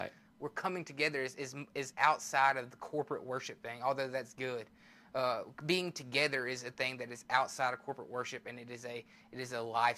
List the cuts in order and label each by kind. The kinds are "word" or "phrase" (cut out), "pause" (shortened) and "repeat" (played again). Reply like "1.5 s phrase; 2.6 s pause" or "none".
none